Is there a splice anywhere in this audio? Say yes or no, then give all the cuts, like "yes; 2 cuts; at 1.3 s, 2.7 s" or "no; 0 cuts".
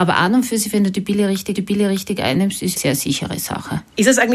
yes; 2 cuts; at 1.5 s, 2.8 s